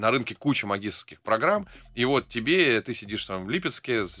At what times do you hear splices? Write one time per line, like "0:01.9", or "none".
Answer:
none